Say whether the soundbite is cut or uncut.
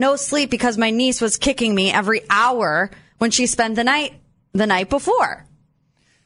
uncut